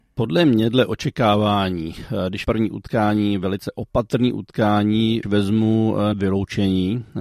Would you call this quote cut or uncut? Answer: cut